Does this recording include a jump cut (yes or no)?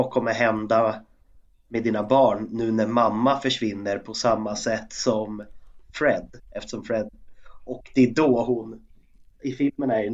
no